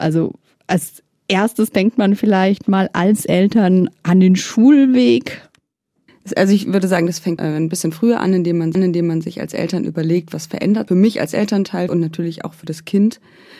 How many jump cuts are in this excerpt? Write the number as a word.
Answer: four